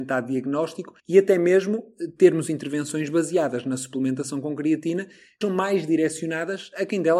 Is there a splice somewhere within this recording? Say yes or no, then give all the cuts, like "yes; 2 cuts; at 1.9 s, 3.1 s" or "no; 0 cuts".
yes; 2 cuts; at 1.0 s, 5.4 s